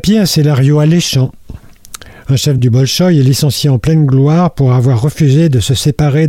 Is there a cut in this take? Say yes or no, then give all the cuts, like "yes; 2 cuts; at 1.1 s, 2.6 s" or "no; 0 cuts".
yes; 1 cut; at 2.6 s